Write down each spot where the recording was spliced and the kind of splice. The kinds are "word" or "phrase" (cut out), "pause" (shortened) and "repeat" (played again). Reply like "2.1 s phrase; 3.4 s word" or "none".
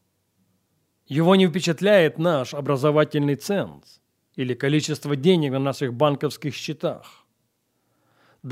none